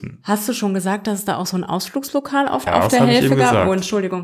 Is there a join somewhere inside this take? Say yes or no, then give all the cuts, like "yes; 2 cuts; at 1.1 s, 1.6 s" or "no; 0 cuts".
yes; 1 cut; at 2.7 s